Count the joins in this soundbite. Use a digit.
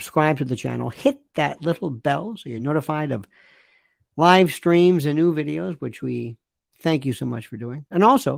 0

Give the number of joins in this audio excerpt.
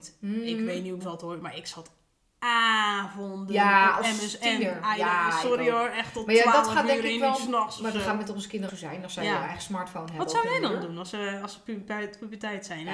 2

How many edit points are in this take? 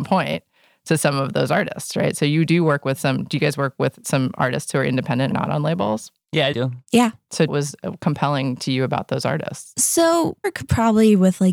4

